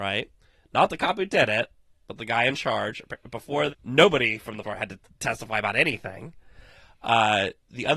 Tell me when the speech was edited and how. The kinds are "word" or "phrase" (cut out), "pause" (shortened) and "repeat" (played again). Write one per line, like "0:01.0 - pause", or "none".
0:03.7 - word
0:04.6 - word